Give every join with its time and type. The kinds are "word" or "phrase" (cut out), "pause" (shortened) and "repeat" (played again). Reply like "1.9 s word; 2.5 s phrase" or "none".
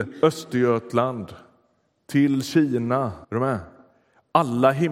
3.2 s pause